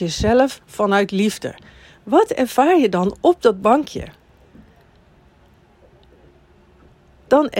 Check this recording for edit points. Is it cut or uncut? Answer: uncut